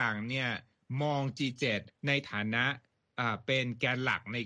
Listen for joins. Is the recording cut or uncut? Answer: cut